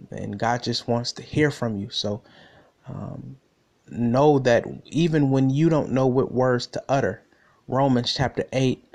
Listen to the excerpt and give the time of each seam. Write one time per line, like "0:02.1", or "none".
none